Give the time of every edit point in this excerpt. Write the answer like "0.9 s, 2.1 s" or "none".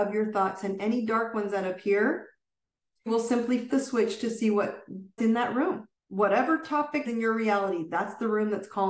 3.1 s, 3.7 s, 5.2 s, 6.0 s, 7.1 s